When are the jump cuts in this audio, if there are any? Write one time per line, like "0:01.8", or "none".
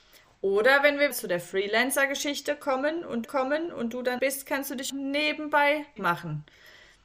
0:01.1
0:03.2
0:04.2
0:04.9
0:06.0